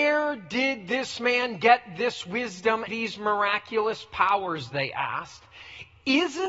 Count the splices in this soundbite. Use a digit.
1